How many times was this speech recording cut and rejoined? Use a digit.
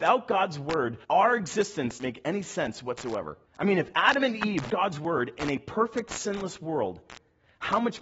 4